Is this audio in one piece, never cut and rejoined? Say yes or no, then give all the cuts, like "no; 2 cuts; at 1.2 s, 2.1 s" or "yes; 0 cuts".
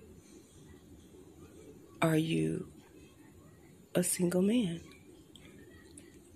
yes; 0 cuts